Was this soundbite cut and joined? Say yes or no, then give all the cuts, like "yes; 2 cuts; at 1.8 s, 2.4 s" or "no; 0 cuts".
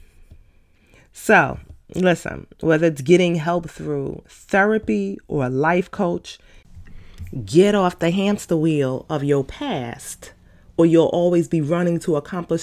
no; 0 cuts